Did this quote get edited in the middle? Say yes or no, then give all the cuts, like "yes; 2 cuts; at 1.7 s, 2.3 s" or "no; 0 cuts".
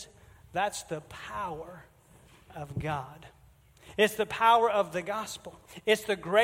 no; 0 cuts